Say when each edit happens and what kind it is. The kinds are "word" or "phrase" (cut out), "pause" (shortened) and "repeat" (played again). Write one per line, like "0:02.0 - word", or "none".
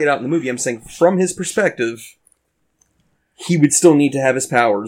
none